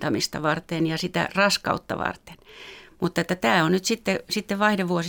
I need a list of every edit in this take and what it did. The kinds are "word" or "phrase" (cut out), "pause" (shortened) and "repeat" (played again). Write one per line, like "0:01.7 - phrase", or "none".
none